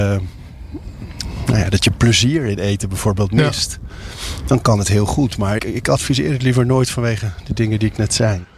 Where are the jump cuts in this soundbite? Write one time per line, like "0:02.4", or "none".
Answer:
0:05.6